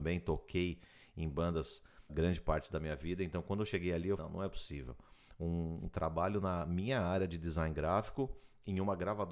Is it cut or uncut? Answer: cut